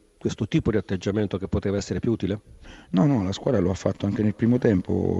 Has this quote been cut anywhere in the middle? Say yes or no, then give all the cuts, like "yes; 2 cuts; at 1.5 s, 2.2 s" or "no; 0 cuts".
no; 0 cuts